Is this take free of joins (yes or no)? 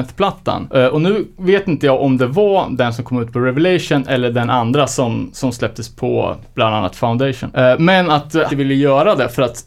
no